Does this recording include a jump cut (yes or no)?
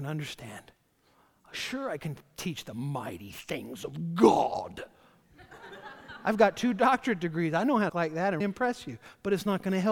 yes